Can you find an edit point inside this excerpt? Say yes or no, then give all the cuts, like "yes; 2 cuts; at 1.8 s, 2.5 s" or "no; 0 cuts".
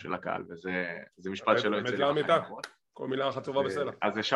no; 0 cuts